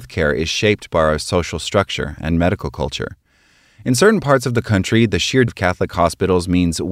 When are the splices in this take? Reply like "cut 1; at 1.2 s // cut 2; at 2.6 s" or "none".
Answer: cut 1; at 5.5 s